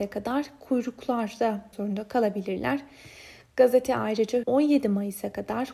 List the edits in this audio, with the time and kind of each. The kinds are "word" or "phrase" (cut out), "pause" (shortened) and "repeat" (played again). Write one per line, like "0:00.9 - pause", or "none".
0:01.7 - word
0:04.4 - word

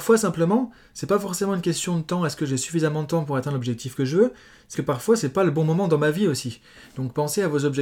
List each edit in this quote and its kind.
0:04.7 - word

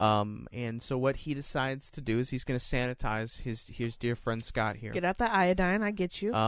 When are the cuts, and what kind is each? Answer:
none

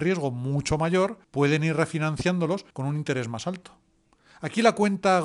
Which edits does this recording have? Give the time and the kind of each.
0:01.2 - pause
0:02.7 - pause

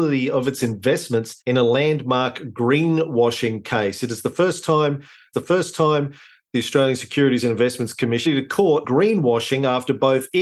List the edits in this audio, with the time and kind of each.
0:01.4 - pause
0:05.3 - repeat
0:08.3 - phrase
0:08.8 - word

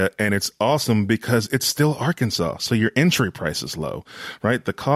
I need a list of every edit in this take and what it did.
none

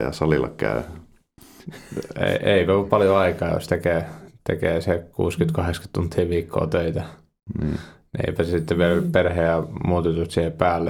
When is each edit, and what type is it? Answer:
none

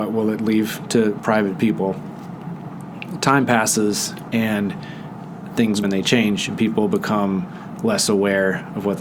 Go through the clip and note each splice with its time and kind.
0:05.8 - word

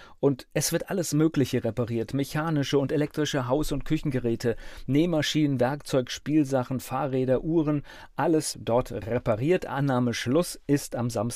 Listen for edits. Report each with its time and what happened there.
0:08.5 - word

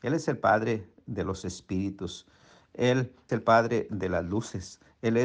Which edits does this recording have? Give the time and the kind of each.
0:03.3 - word

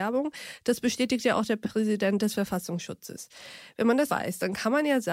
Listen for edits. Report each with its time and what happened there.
0:04.1 - word

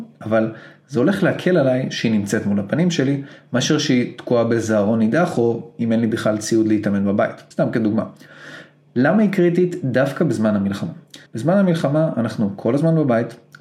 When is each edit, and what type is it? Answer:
0:07.5 - pause
0:11.3 - pause

